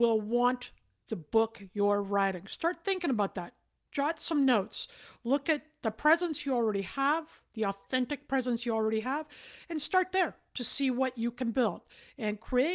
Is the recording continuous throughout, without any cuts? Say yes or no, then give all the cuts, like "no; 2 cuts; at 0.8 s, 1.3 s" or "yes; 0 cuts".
yes; 0 cuts